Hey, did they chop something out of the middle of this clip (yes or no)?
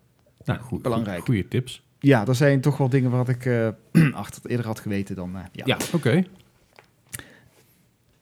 no